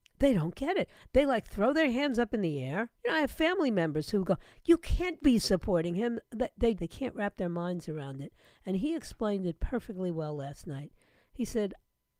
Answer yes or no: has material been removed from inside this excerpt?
yes